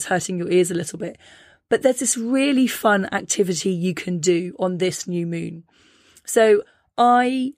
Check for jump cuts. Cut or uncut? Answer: uncut